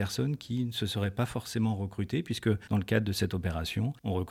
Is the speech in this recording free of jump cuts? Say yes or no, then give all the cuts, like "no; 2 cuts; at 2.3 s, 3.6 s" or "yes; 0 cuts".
yes; 0 cuts